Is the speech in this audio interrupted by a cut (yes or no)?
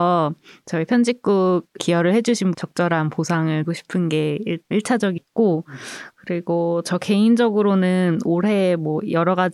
yes